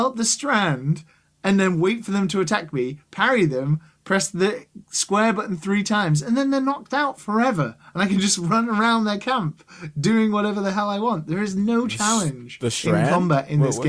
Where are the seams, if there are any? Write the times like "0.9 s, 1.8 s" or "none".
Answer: none